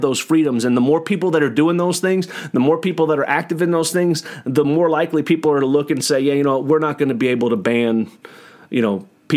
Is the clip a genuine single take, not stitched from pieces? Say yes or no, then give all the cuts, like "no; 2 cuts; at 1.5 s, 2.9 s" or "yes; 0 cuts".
yes; 0 cuts